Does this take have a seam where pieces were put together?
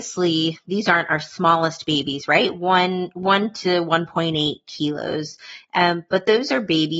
no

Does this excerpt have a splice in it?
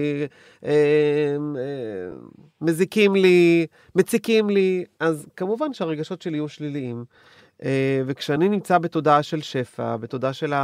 no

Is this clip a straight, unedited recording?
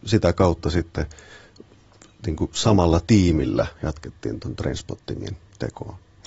yes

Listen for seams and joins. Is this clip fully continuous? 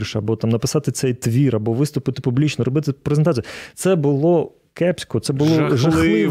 yes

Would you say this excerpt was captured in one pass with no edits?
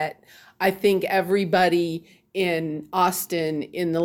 yes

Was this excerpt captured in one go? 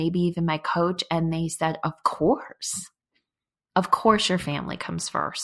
yes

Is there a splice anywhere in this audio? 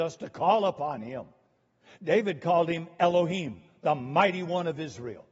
no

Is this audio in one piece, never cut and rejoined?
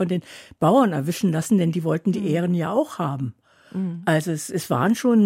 yes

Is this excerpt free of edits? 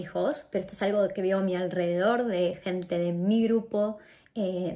yes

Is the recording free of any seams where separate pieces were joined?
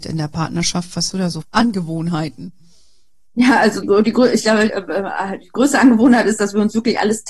no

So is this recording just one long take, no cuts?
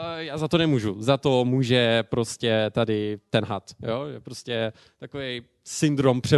yes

